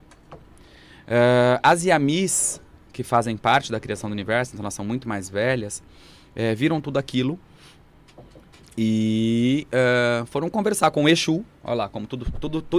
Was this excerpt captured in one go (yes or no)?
yes